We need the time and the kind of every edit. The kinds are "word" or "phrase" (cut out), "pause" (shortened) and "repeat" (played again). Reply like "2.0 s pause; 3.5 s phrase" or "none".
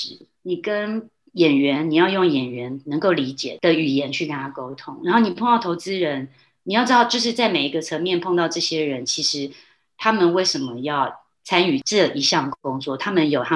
11.3 s pause

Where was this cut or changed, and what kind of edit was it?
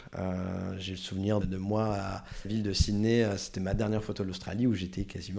1.4 s word; 2.4 s phrase

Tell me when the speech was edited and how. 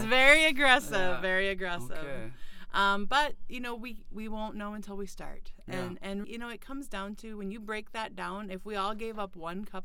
6.2 s word

